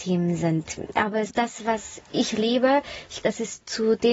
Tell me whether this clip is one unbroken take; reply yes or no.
no